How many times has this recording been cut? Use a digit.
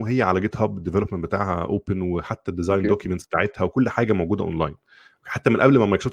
0